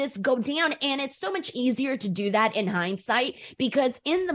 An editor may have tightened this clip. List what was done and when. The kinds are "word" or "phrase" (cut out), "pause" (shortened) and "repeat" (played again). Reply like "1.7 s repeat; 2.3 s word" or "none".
none